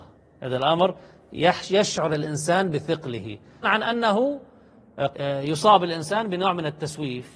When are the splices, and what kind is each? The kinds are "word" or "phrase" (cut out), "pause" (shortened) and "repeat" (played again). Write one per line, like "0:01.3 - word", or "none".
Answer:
0:03.6 - word
0:05.1 - word